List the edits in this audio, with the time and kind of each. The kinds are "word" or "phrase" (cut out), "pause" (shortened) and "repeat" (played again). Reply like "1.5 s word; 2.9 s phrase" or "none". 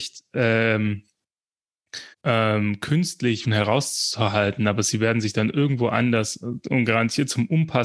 2.1 s pause; 3.4 s word